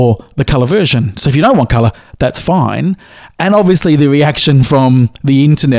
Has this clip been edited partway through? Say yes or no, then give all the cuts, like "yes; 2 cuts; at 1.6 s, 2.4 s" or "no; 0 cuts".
no; 0 cuts